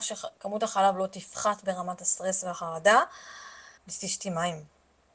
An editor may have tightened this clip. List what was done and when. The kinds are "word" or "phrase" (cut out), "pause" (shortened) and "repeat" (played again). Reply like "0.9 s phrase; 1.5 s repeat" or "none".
3.8 s pause